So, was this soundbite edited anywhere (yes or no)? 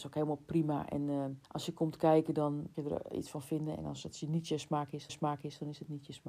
yes